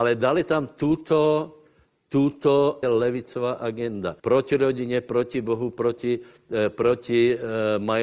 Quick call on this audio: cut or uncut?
cut